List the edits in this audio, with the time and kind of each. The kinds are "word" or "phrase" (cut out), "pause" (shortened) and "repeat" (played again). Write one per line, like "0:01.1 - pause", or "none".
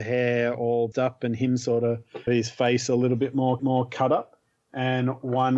0:00.9 - word
0:02.3 - word
0:03.6 - repeat